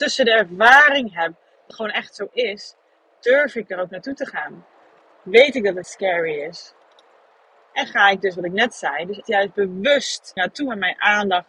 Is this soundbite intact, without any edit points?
no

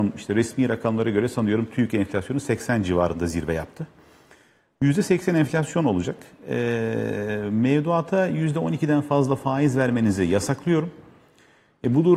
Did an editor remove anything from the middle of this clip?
no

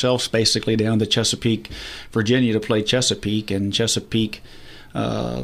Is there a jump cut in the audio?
no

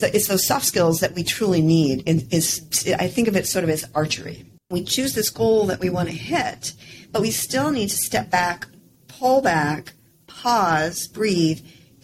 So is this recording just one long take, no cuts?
no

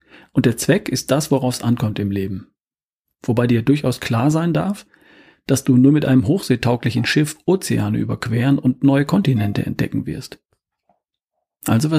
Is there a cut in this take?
no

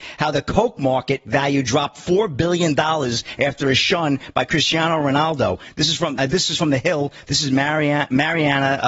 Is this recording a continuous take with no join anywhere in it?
no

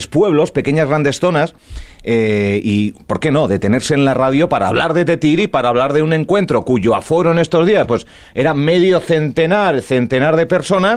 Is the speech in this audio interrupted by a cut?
no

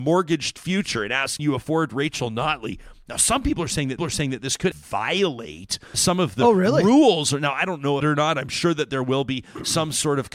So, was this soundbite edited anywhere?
yes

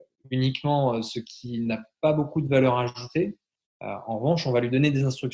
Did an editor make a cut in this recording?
no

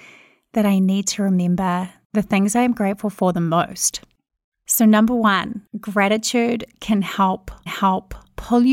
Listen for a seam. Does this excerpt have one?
yes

